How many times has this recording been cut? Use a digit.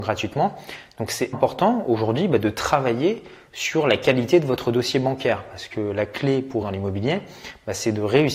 2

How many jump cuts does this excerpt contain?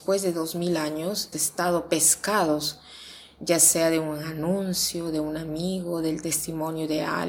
1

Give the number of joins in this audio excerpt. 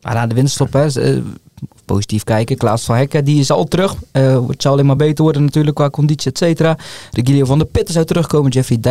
0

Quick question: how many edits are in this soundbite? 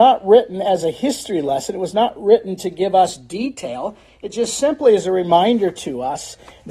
0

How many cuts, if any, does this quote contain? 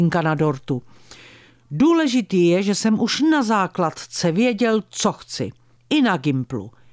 0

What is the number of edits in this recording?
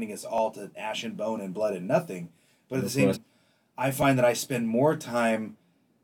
1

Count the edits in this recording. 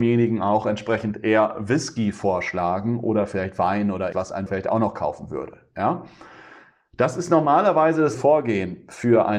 3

